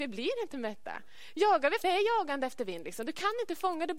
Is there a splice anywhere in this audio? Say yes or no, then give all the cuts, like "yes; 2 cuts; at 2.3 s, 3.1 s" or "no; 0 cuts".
yes; 1 cut; at 1.8 s